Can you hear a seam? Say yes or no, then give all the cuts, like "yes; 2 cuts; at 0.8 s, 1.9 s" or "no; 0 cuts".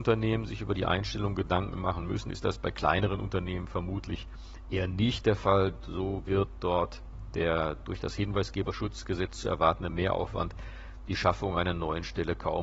no; 0 cuts